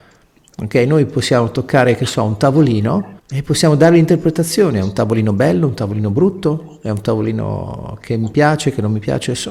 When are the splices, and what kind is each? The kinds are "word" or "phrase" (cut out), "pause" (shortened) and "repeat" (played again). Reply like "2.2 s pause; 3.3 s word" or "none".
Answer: 3.2 s pause